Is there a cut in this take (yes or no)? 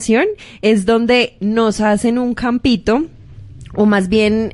no